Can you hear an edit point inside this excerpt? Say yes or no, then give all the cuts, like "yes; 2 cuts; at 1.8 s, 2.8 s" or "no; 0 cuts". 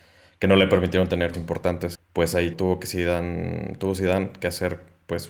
yes; 3 cuts; at 1.3 s, 1.9 s, 2.5 s